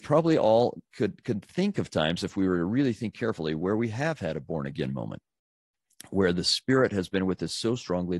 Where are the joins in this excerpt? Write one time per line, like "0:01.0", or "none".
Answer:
none